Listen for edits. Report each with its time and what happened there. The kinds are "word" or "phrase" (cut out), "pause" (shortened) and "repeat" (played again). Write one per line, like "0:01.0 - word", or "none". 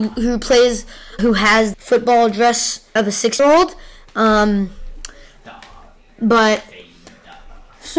0:01.2 - word
0:01.7 - word
0:03.0 - word
0:03.4 - word